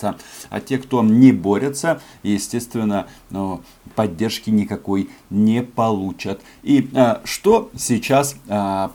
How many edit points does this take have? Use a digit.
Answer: 0